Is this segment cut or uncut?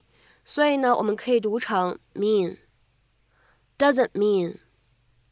cut